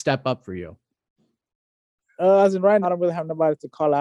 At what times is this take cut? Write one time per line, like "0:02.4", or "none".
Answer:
0:02.8